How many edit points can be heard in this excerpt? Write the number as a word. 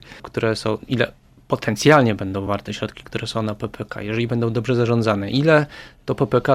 zero